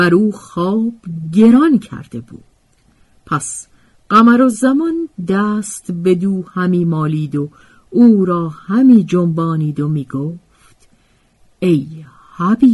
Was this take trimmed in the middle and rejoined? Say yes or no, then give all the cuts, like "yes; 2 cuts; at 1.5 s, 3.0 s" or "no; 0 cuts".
no; 0 cuts